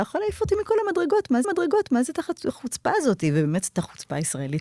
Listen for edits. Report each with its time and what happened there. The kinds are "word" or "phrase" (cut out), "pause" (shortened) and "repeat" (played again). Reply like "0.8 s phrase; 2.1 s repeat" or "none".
1.4 s repeat